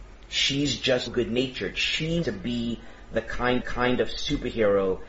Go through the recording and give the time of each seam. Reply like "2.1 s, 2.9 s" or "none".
1.1 s, 2.2 s, 3.6 s